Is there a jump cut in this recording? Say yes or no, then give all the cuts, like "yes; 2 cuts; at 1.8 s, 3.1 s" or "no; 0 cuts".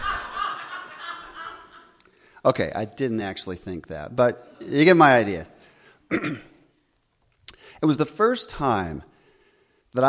no; 0 cuts